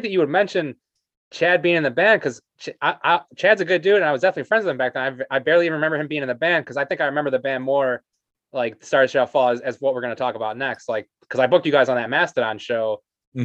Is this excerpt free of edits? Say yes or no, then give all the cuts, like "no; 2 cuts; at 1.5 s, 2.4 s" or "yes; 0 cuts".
yes; 0 cuts